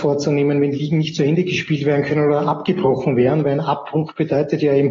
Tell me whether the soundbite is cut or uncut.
uncut